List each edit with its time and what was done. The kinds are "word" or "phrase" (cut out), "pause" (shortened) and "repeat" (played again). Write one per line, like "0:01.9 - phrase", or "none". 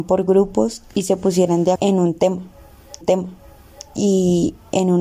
0:01.8 - word
0:03.0 - repeat